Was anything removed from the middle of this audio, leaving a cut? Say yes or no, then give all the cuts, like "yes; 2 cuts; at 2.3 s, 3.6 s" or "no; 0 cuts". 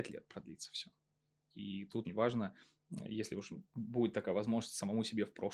yes; 1 cut; at 2.1 s